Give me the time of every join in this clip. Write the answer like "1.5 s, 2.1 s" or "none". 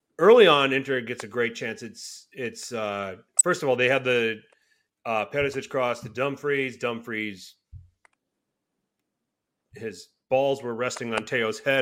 none